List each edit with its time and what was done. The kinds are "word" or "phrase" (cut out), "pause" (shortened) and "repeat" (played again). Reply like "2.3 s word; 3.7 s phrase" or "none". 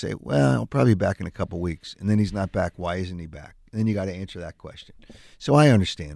none